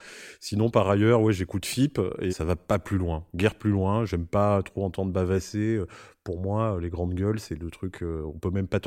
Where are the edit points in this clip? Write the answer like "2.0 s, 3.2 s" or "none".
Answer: 2.3 s